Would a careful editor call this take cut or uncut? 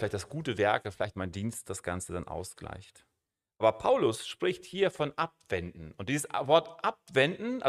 uncut